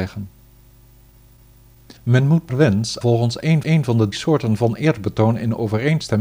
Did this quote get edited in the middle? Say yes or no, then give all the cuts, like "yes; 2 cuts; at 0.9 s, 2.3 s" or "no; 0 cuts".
yes; 5 cuts; at 2.0 s, 2.5 s, 3.0 s, 3.6 s, 4.1 s